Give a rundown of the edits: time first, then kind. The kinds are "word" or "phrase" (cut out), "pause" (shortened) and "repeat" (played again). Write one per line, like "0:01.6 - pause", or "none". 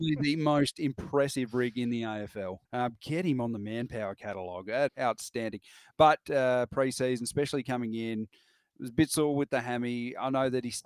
0:02.6 - pause
0:04.9 - word
0:06.2 - phrase